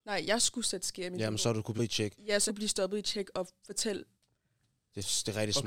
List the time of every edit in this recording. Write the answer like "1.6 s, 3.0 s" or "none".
1.8 s, 2.5 s